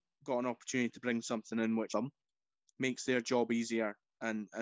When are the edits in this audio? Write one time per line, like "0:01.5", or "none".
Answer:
0:01.9